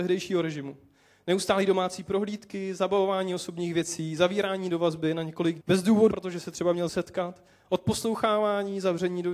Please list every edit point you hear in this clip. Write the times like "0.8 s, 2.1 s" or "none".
5.6 s, 6.1 s, 6.9 s